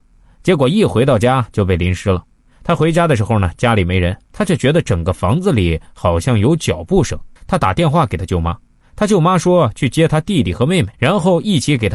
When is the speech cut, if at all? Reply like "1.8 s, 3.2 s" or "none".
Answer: 4.2 s, 7.4 s, 10.9 s

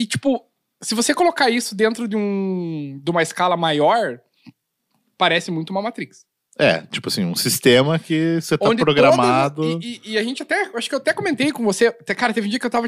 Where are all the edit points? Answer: none

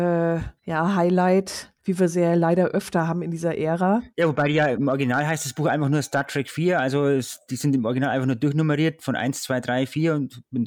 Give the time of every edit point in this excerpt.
1.8 s

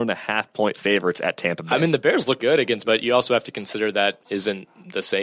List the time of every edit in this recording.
2.4 s, 2.8 s, 4.2 s

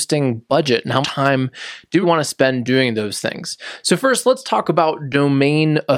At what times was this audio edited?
1.0 s, 2.0 s

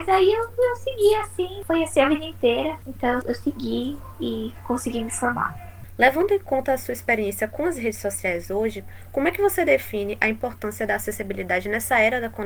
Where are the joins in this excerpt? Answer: none

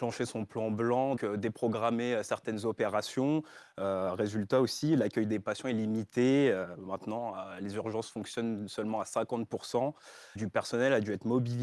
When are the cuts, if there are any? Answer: 1.2 s, 10.4 s

